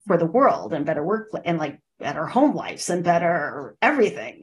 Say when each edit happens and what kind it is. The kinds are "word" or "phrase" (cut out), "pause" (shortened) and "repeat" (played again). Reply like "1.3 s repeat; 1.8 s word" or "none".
none